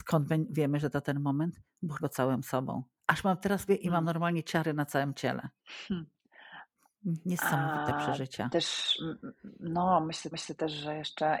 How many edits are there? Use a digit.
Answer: 5